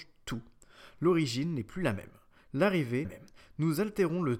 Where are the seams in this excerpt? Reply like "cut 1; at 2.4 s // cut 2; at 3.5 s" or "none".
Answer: cut 1; at 3.0 s